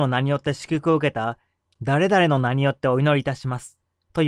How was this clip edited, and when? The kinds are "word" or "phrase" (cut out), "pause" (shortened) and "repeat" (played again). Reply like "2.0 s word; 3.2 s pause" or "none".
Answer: none